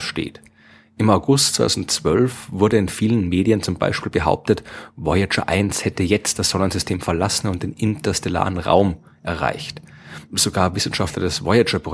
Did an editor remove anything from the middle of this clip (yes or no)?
no